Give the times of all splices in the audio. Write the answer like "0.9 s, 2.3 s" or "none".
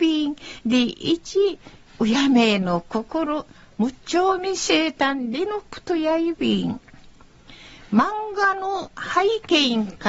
none